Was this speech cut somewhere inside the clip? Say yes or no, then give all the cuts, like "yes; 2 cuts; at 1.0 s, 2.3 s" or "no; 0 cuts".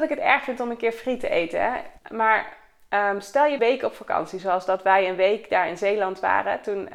yes; 2 cuts; at 2.0 s, 3.6 s